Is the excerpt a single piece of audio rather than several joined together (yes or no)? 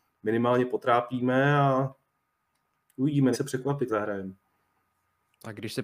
no